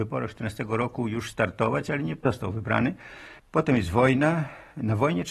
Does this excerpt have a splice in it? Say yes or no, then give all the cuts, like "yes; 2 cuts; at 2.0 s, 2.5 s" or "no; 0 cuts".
no; 0 cuts